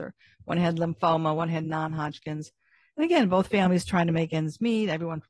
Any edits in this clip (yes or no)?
no